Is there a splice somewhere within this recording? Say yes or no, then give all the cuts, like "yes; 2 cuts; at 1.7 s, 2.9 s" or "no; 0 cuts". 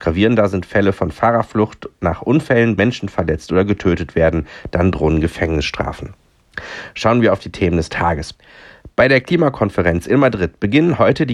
yes; 1 cut; at 2.8 s